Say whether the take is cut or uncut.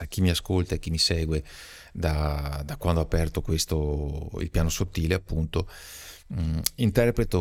cut